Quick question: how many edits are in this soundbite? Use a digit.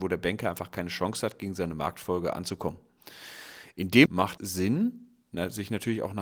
2